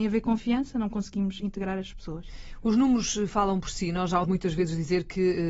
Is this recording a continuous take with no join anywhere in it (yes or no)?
no